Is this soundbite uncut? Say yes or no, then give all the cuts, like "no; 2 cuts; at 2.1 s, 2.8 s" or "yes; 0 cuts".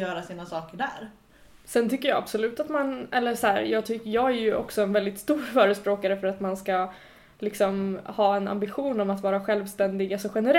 yes; 0 cuts